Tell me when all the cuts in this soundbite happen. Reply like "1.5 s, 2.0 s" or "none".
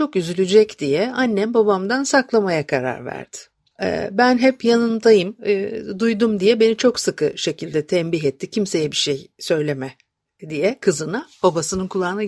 5.4 s

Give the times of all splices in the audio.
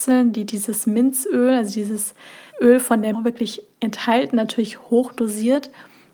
2.5 s, 3.1 s

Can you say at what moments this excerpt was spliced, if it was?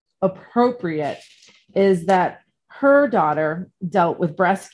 none

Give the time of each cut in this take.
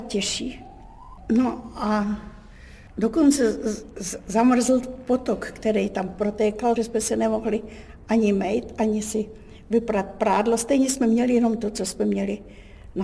6.8 s

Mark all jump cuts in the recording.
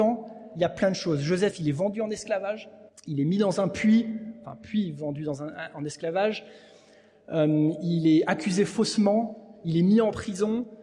2.9 s

